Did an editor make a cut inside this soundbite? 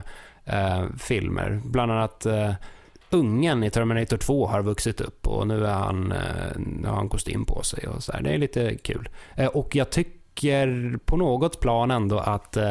no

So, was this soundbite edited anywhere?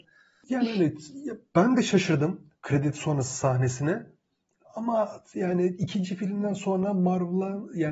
no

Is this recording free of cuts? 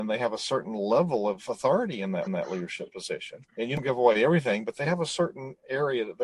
no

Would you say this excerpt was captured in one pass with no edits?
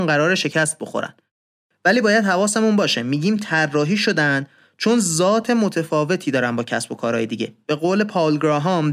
yes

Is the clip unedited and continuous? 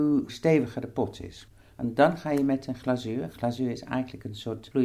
yes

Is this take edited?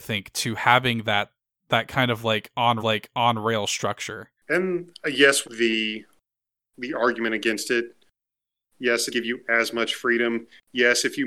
yes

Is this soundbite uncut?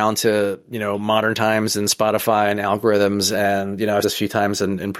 no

